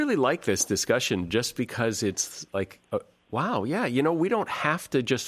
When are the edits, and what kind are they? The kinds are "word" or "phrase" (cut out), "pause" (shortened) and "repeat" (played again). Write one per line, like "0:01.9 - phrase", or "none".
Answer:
none